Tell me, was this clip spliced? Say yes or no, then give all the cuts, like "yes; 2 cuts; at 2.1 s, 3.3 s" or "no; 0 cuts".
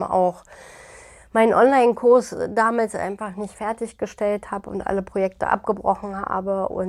no; 0 cuts